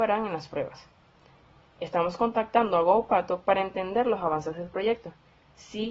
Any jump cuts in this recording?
no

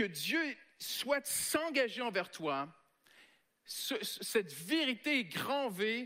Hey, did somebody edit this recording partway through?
no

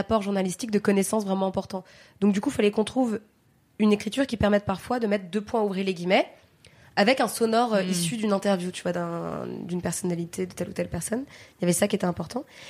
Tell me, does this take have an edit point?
no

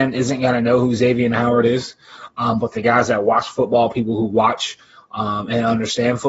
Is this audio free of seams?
yes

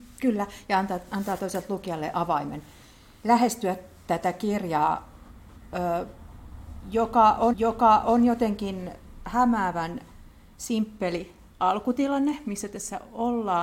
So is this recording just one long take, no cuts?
no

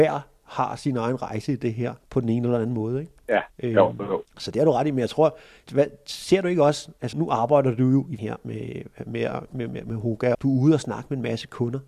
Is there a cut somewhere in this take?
yes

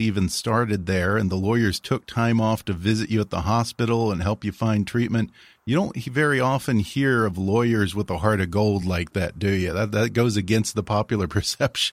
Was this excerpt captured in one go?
yes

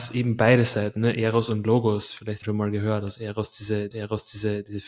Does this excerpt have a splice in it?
yes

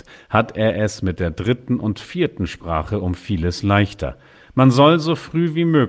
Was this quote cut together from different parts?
no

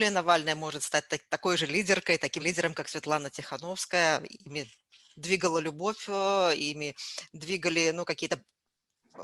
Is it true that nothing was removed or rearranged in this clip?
no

